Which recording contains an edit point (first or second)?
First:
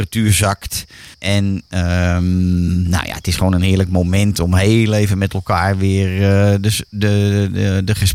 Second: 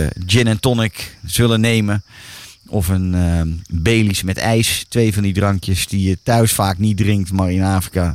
first